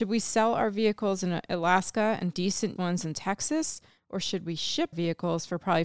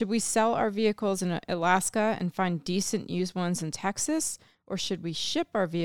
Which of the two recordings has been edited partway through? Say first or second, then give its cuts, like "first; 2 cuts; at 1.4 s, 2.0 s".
first; 3 cuts; at 2.3 s, 2.8 s, 4.9 s